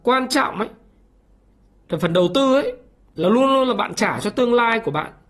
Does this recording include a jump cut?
no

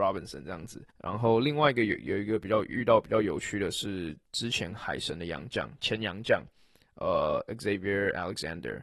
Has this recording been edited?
no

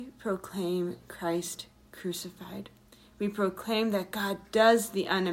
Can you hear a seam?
no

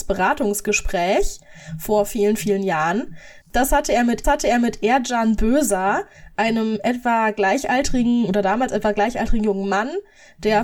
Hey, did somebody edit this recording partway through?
yes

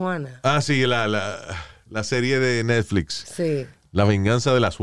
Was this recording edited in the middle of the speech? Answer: no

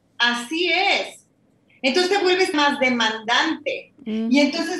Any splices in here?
yes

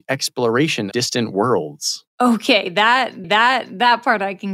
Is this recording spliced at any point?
yes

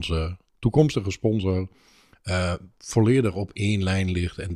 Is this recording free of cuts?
yes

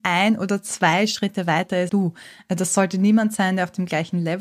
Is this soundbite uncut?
no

